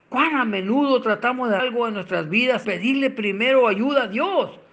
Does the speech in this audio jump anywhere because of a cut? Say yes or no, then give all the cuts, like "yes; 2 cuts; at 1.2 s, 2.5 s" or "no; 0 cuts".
yes; 2 cuts; at 1.6 s, 2.6 s